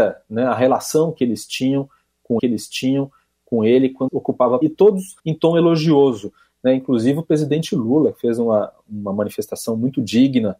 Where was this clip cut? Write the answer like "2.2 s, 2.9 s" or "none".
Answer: 2.4 s, 4.1 s, 4.6 s, 5.2 s